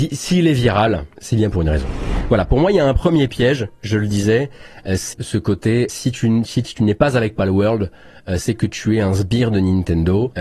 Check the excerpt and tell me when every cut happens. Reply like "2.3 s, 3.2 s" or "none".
5.1 s, 5.9 s, 6.6 s